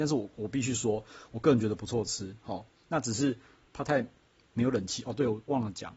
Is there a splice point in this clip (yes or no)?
no